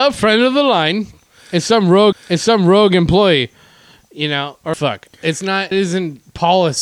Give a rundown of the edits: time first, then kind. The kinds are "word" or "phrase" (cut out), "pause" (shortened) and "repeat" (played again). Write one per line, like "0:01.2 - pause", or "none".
0:02.1 - repeat
0:04.7 - phrase
0:05.7 - word